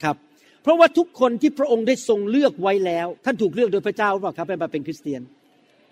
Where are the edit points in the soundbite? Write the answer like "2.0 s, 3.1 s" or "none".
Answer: 3.2 s